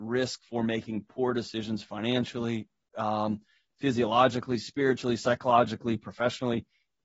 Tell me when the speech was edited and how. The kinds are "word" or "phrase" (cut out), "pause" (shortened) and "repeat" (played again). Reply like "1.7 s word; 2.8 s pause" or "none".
none